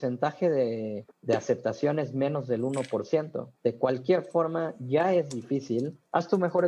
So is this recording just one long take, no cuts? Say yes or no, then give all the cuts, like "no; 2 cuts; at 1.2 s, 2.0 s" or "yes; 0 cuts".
no; 2 cuts; at 1.1 s, 3.6 s